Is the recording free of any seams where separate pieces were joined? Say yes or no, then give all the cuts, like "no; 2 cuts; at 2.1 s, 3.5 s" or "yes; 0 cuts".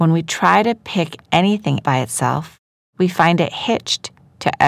no; 1 cut; at 1.8 s